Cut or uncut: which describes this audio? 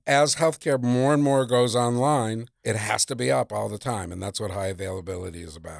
uncut